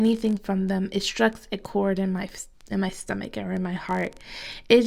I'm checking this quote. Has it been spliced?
no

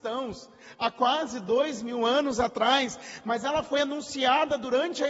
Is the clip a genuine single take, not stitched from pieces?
yes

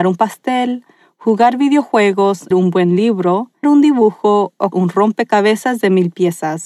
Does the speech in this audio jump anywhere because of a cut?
yes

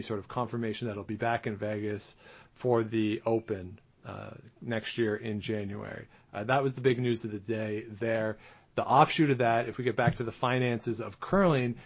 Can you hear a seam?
no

